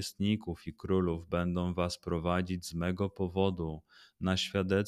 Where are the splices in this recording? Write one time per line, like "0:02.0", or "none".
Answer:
none